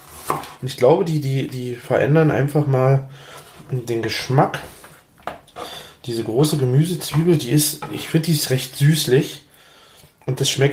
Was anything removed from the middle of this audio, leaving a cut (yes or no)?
no